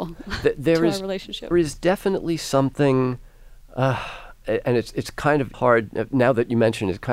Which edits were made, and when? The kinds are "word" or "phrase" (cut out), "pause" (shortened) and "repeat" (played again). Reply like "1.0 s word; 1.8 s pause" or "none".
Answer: 1.5 s phrase; 5.5 s word

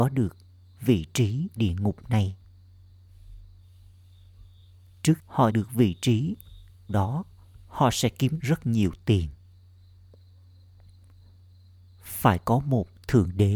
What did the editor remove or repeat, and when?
1.6 s word; 5.2 s word; 5.5 s word; 6.9 s word; 8.4 s word

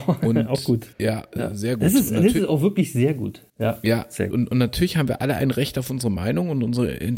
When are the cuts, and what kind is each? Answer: 0.9 s pause; 3.5 s pause; 4.3 s phrase

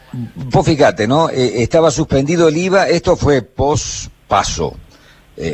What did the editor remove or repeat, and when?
none

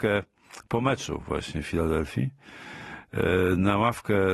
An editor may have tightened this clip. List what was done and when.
none

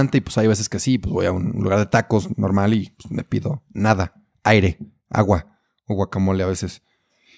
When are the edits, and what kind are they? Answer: none

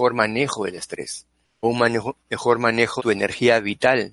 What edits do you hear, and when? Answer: 1.6 s word; 3.0 s word

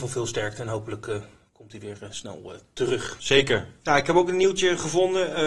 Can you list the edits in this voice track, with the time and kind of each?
none

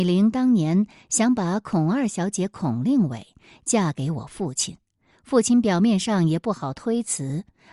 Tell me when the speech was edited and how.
none

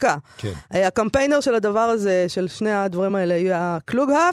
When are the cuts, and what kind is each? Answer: none

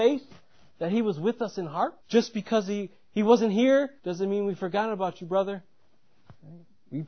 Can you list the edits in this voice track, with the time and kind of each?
2.0 s pause; 4.0 s pause

